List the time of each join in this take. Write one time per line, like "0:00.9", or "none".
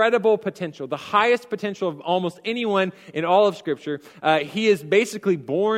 none